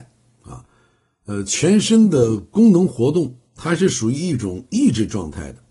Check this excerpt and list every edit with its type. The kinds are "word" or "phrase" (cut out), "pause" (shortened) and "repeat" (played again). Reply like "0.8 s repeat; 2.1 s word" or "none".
3.5 s pause